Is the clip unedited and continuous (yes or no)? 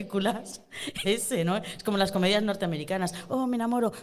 no